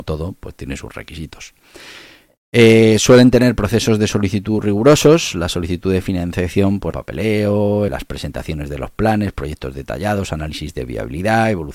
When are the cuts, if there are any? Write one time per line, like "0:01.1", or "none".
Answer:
0:06.9
0:07.9